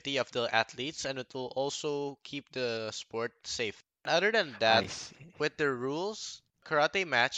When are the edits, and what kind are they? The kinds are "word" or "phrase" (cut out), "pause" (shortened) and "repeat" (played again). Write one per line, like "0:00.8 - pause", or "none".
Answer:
none